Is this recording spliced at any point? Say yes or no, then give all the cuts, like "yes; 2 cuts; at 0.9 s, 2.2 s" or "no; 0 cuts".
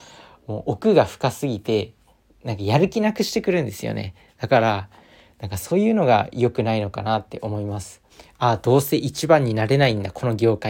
yes; 1 cut; at 8.1 s